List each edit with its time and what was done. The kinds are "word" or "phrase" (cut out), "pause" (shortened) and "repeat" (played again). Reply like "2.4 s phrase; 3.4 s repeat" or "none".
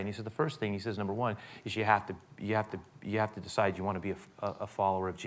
2.7 s repeat